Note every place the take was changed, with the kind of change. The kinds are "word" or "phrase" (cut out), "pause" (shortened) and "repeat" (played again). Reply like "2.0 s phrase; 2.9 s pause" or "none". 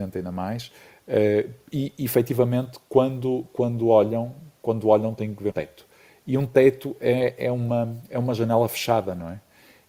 5.5 s word